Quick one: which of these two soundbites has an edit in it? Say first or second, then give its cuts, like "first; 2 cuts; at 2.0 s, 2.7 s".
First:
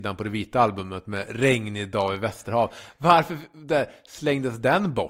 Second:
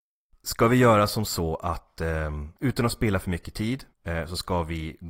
second; 2 cuts; at 2.6 s, 3.9 s